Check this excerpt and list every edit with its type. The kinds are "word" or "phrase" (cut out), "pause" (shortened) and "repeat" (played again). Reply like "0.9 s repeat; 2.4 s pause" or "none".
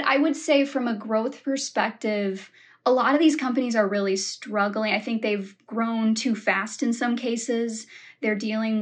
none